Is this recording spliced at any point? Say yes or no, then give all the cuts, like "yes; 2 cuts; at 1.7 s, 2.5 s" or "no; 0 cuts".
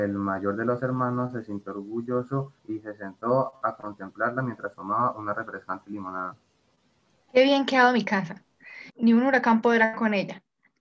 yes; 3 cuts; at 2.6 s, 6.9 s, 8.9 s